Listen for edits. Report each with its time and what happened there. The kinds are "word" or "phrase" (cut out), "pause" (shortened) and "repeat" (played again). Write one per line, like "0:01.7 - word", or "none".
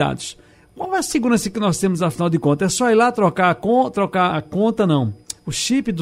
0:04.3 - word